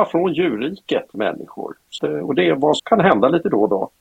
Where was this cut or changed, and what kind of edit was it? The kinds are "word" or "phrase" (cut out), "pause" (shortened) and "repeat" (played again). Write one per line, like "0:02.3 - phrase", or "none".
0:01.1 - word
0:02.0 - word
0:02.8 - word